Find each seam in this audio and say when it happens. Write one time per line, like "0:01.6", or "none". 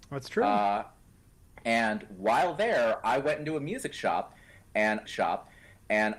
0:05.1